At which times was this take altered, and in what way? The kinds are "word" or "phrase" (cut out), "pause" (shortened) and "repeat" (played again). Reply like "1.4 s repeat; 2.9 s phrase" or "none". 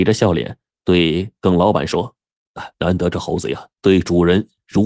2.7 s pause; 3.7 s pause